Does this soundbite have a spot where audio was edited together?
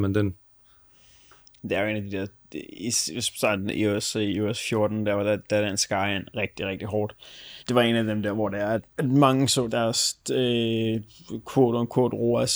yes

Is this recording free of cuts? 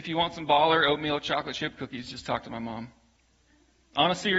yes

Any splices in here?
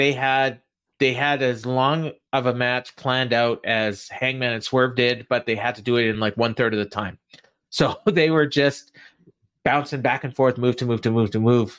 no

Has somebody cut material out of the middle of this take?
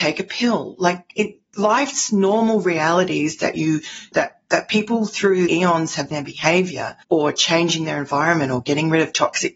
yes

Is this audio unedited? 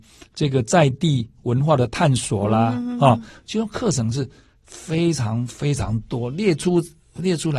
yes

